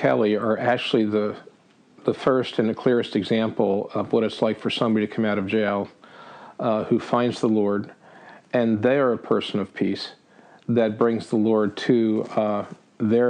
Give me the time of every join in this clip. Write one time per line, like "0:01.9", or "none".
none